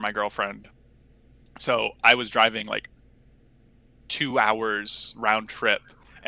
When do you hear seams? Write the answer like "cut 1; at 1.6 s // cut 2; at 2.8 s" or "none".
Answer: none